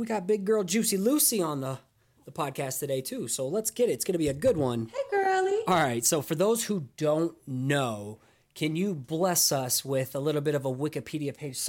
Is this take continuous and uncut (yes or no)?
yes